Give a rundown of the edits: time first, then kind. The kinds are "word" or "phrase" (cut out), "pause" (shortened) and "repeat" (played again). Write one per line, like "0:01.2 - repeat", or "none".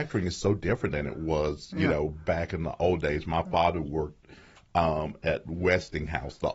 none